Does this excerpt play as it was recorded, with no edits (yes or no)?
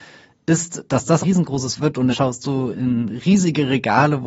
no